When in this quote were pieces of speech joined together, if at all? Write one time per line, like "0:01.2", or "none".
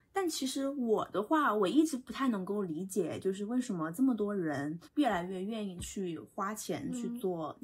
0:04.9